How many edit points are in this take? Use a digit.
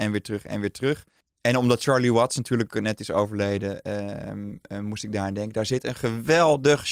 1